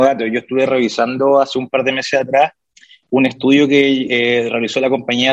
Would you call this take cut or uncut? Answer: uncut